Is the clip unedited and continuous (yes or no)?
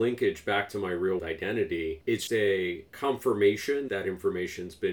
no